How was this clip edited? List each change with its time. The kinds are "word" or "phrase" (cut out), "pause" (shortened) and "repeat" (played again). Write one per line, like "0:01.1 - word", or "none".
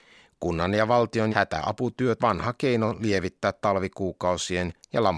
0:01.3 - word
0:02.2 - word